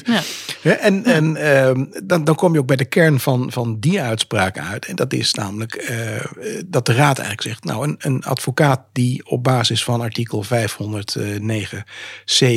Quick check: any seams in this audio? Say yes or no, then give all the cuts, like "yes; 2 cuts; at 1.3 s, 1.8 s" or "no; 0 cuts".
no; 0 cuts